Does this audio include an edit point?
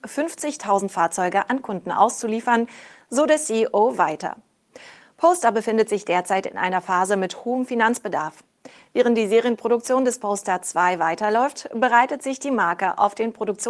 no; 0 cuts

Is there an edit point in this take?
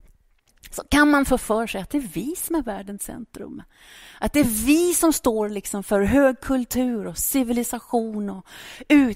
no; 0 cuts

